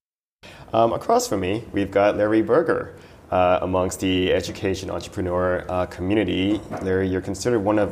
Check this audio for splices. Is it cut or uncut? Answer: uncut